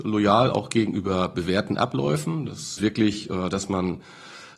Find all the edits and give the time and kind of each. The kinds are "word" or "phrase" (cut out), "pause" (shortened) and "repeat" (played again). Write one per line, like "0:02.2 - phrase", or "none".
0:02.8 - phrase